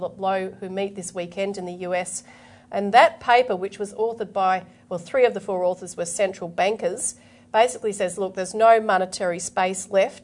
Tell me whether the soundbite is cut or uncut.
uncut